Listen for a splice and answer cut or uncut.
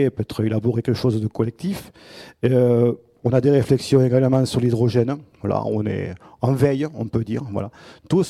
uncut